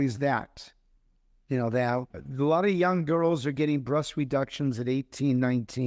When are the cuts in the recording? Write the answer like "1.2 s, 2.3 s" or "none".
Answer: 2.1 s